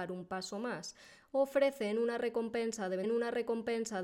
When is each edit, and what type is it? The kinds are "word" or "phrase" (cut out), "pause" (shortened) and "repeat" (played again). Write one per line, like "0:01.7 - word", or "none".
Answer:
0:03.0 - repeat